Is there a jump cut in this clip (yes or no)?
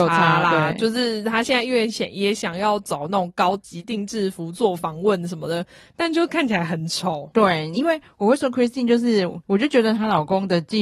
no